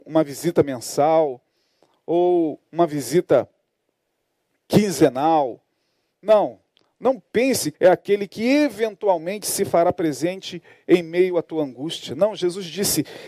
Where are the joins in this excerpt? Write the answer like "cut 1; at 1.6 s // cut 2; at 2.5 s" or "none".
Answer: cut 1; at 7.7 s